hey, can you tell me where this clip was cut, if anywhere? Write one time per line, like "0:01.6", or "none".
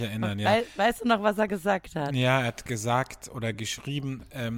none